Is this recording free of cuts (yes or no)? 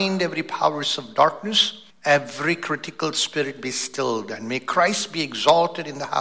no